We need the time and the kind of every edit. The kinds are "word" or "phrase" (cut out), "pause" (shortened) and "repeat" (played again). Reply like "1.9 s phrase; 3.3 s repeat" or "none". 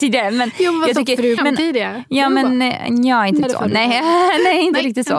1.4 s phrase; 3.4 s word